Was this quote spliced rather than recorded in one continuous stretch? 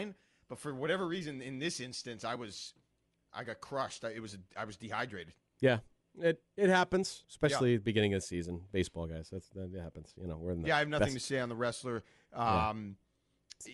no; 0 cuts

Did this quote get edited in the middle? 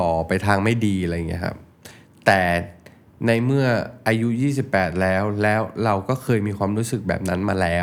no; 0 cuts

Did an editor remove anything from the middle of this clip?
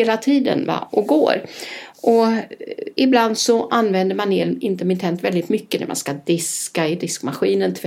no; 0 cuts

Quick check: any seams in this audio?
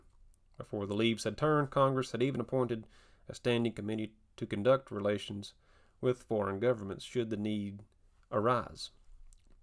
no; 0 cuts

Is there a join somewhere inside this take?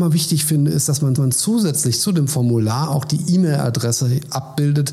yes; 1 cut; at 1.2 s

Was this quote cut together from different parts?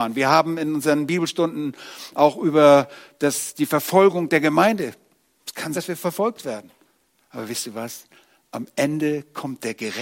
yes; 1 cut; at 5.7 s

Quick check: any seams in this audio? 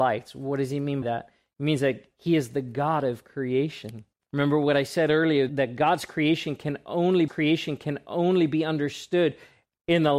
yes; 4 cuts; at 1.0 s, 4.1 s, 5.5 s, 7.3 s

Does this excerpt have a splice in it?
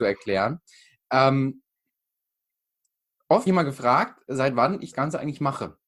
yes; 2 cuts; at 3.5 s, 4.9 s

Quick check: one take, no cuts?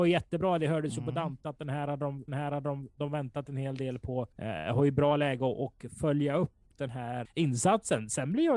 no; 3 cuts; at 2.3 s, 4.3 s, 7.2 s

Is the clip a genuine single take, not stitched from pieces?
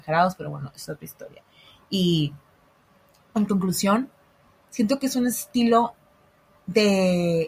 yes; 0 cuts

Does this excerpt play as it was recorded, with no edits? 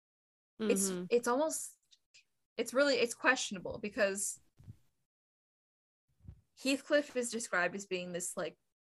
yes; 0 cuts

